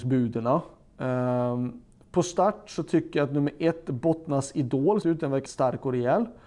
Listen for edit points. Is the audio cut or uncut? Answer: cut